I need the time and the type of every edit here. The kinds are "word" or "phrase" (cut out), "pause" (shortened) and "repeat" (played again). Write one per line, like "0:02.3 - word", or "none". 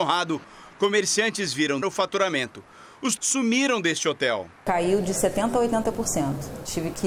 0:01.8 - word
0:03.2 - word